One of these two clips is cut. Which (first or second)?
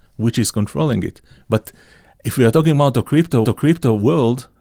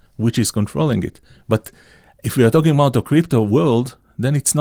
first